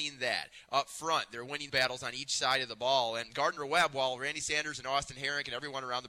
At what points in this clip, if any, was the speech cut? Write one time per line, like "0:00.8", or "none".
0:01.7